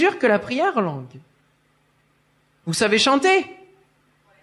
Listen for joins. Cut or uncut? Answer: uncut